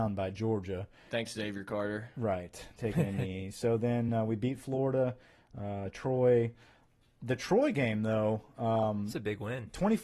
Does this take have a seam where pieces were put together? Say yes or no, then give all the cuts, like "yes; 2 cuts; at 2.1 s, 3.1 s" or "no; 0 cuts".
no; 0 cuts